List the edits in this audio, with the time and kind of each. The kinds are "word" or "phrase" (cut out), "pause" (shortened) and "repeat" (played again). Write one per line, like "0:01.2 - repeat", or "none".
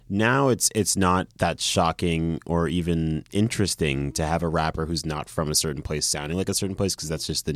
0:01.3 - pause